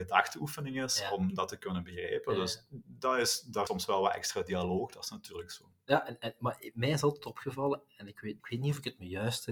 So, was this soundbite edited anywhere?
yes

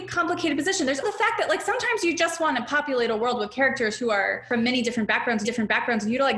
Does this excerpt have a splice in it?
yes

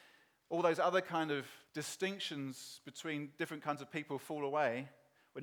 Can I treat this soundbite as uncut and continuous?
no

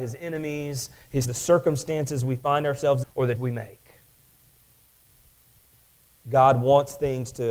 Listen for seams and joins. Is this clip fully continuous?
no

